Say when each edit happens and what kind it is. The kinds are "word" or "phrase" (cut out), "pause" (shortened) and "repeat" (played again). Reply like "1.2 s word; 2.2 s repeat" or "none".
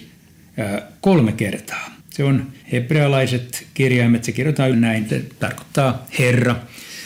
2.0 s pause; 2.6 s pause; 4.7 s word; 5.1 s word